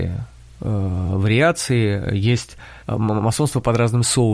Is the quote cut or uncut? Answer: cut